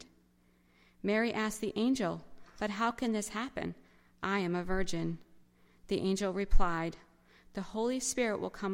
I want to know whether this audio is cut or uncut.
uncut